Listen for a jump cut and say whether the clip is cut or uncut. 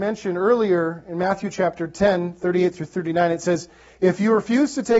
uncut